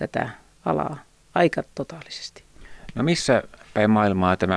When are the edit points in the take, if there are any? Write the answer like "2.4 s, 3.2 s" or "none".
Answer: none